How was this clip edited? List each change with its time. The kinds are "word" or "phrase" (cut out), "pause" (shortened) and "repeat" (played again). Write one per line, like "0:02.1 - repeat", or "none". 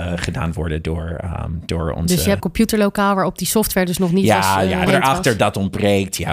0:02.4 - phrase
0:04.9 - phrase

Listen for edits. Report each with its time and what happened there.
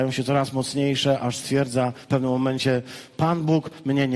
none

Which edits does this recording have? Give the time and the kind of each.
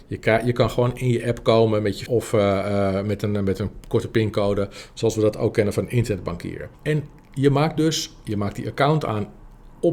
0:02.1 - word
0:06.7 - pause

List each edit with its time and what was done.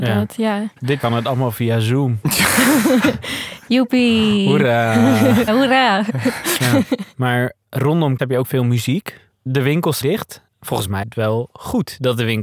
0:01.0 - word
0:05.5 - word
0:08.2 - word
0:10.0 - word
0:11.0 - word

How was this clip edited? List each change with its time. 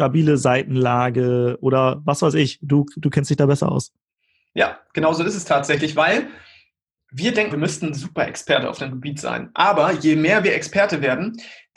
0:07.5 - word

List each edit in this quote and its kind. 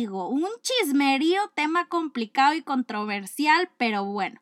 none

